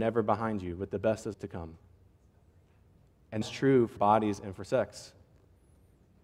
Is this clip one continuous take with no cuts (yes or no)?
no